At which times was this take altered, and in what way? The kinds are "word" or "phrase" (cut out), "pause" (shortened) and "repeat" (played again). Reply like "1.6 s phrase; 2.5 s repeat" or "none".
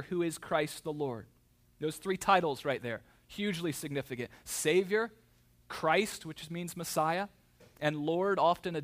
none